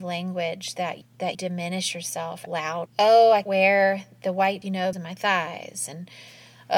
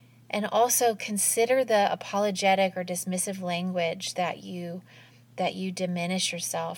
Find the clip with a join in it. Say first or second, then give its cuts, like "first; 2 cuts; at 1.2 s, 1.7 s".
first; 7 cuts; at 1.0 s, 1.3 s, 2.5 s, 2.9 s, 3.4 s, 4.6 s, 4.9 s